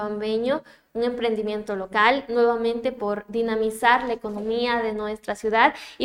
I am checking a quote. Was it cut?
no; 0 cuts

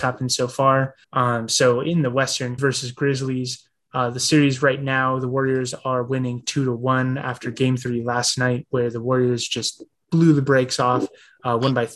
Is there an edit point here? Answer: yes; 2 cuts; at 1.0 s, 2.6 s

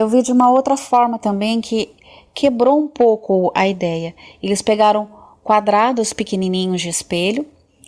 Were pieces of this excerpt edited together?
no; 0 cuts

